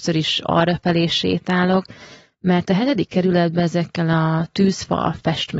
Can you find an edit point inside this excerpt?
no; 0 cuts

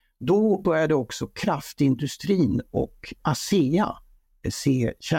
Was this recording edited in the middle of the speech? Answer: yes; 1 cut; at 3.2 s

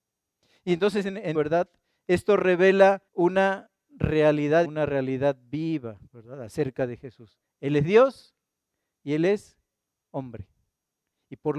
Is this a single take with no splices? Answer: no; 4 cuts; at 1.3 s, 3.1 s, 4.6 s, 6.1 s

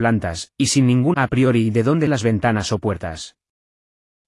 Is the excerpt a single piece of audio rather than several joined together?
no; 2 cuts; at 1.1 s, 2.1 s

